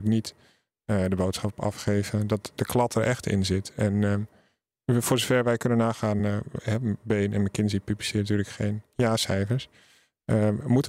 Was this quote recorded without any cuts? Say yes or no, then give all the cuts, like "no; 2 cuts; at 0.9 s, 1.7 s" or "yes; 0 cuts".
yes; 0 cuts